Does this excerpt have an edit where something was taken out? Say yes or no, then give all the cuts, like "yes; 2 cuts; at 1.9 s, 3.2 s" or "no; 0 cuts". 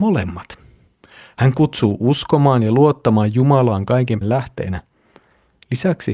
yes; 1 cut; at 4.2 s